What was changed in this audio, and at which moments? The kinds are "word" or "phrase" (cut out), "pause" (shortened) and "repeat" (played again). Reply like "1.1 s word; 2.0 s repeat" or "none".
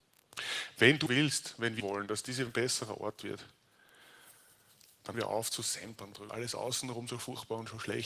1.1 s word; 1.8 s word; 2.5 s word; 5.1 s word; 6.3 s word